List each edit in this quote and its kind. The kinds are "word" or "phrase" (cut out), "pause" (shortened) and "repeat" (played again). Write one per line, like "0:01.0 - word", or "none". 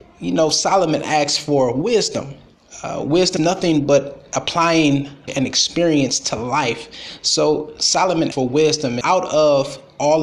0:03.4 - word
0:05.3 - word
0:08.3 - word
0:09.0 - word